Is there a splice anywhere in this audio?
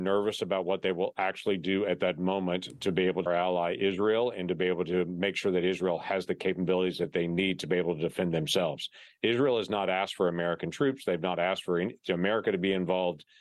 yes; 1 cut; at 3.3 s

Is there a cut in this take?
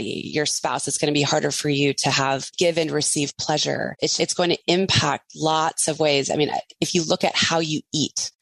yes; 2 cuts; at 2.5 s, 4.2 s

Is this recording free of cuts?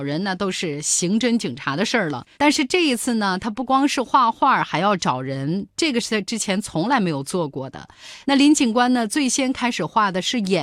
no; 1 cut; at 2.3 s

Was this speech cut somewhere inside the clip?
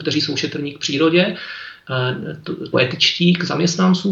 yes; 1 cut; at 2.7 s

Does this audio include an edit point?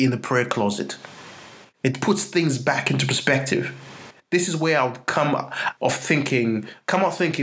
yes; 1 cut; at 5.8 s

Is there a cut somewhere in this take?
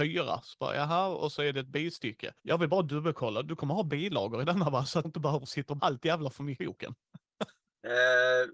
yes; 4 cuts; at 2.4 s, 5.0 s, 5.8 s, 6.6 s

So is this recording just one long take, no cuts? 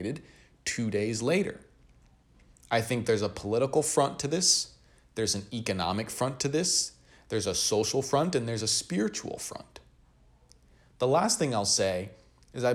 yes; 0 cuts

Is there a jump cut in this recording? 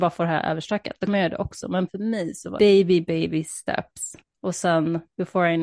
yes; 3 cuts; at 1.9 s, 2.6 s, 4.2 s

